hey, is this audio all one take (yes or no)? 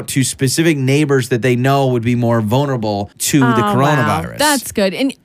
no